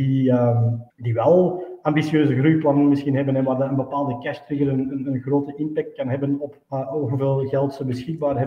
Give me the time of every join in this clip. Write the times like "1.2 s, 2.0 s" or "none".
0.9 s, 6.6 s